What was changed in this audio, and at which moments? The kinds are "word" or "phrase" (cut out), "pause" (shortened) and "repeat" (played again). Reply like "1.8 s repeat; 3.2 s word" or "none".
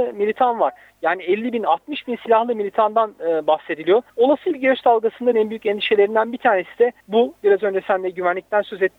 4.1 s pause; 5.3 s word; 7.0 s pause

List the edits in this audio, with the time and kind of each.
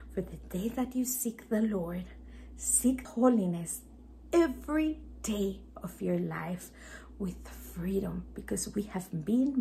3.0 s phrase

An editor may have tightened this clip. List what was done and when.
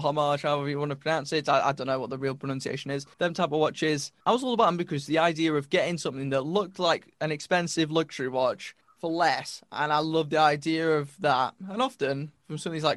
3.1 s pause; 4.2 s pause; 7.1 s pause; 8.8 s pause

